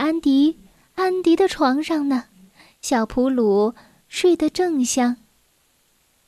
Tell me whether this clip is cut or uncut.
uncut